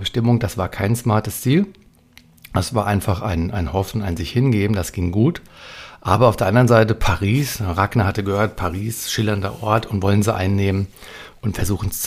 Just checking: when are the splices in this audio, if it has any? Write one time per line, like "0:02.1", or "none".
none